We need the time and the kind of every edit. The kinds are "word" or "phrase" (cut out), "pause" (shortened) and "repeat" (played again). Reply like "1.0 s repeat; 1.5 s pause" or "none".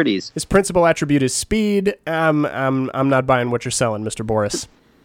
none